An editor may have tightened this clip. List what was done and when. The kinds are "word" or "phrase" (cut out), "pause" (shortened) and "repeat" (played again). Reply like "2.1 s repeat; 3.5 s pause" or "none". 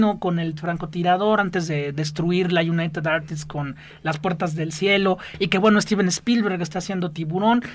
none